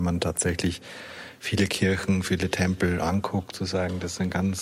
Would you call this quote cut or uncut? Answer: uncut